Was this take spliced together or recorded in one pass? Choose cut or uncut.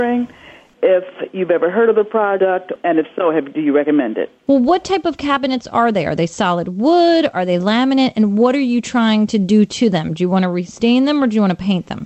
uncut